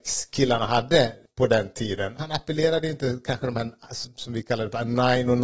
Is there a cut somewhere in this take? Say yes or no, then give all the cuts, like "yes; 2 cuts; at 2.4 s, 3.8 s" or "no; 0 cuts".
no; 0 cuts